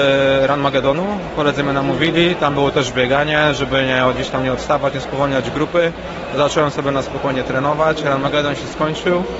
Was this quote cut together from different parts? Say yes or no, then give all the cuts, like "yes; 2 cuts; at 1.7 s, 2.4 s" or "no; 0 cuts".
no; 0 cuts